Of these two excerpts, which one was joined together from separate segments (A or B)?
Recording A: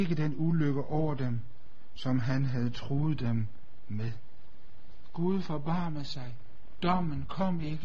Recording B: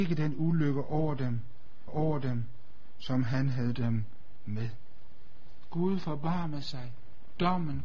B